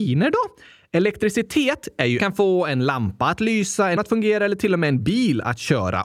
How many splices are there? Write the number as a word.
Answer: two